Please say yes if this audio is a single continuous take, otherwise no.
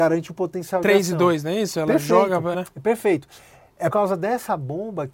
no